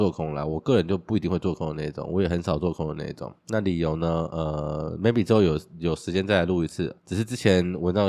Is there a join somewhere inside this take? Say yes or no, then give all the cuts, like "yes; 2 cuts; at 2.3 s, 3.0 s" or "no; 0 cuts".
yes; 2 cuts; at 3.4 s, 7.0 s